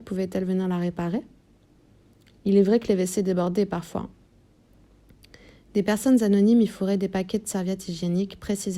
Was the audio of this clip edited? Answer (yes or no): no